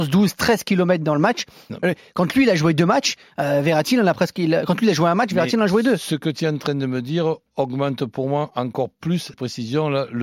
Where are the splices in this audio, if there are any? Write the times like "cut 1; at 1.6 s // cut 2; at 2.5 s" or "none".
cut 1; at 9.3 s